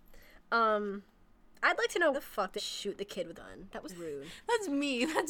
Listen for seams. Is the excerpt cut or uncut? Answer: cut